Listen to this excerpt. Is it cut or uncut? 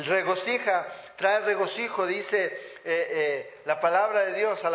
uncut